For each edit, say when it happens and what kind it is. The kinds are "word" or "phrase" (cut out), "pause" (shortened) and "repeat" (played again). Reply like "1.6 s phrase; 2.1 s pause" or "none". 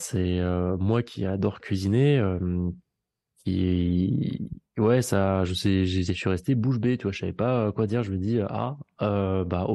4.7 s pause